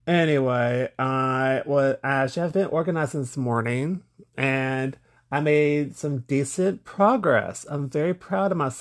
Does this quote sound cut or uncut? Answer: uncut